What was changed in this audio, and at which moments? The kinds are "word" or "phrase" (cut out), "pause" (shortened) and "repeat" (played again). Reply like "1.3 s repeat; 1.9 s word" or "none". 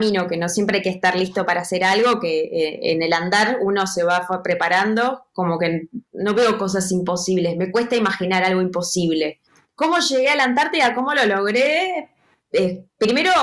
none